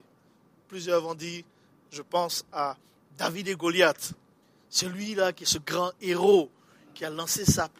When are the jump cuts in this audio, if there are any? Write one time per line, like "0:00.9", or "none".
0:04.4

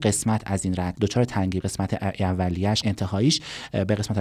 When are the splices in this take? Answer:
0:00.9
0:01.6
0:02.8

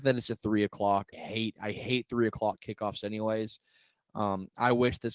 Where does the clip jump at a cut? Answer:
0:01.1

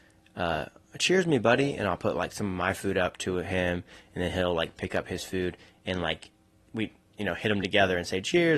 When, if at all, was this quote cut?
none

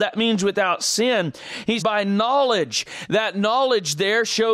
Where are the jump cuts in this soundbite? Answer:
0:01.8

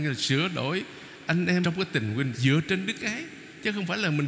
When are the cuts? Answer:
0:01.6
0:02.3

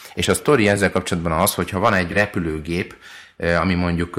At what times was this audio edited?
none

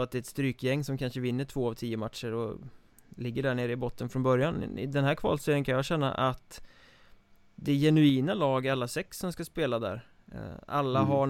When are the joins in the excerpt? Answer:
none

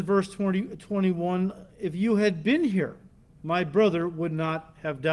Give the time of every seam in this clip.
0:01.7

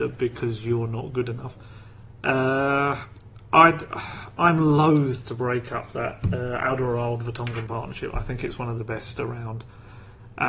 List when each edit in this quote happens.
none

